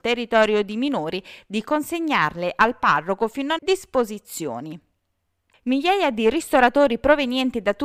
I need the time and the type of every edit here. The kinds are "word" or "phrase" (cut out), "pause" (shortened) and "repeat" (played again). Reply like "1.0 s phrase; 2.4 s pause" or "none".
3.6 s word